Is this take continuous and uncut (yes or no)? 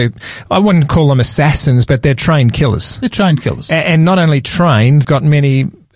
no